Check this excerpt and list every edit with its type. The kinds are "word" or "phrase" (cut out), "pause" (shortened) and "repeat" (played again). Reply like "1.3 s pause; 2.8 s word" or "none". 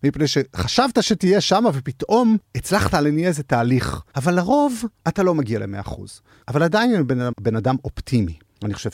7.3 s word